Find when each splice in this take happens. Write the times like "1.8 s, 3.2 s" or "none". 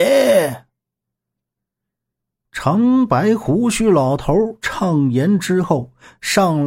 none